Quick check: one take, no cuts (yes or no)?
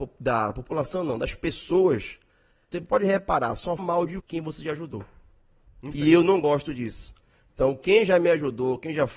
no